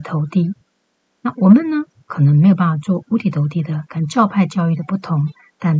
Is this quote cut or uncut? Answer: uncut